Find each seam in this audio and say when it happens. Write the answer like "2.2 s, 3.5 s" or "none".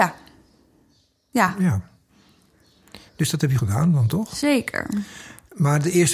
3.6 s

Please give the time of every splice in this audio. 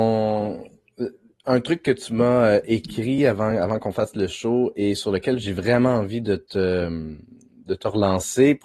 none

